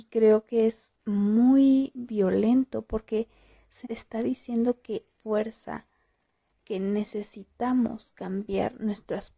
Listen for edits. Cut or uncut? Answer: cut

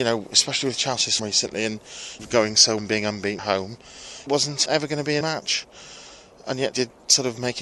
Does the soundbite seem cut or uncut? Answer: cut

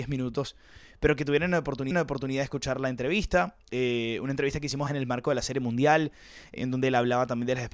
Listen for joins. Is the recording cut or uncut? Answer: cut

